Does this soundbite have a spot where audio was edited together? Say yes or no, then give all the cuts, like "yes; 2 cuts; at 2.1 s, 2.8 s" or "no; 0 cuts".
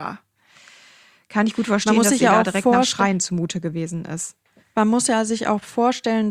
yes; 1 cut; at 4.6 s